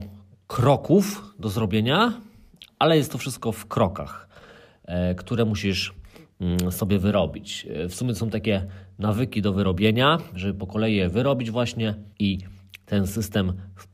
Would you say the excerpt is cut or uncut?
cut